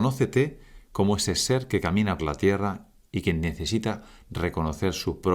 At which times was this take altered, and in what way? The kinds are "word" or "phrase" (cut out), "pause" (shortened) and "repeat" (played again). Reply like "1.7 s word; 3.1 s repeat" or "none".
2.2 s word